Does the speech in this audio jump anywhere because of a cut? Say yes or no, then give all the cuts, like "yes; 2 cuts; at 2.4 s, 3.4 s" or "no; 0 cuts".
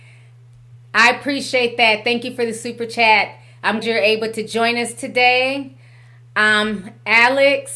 yes; 1 cut; at 3.8 s